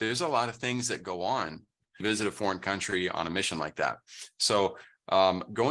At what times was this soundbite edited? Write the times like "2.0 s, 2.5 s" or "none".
none